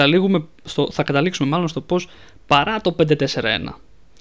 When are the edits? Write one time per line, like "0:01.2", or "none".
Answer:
none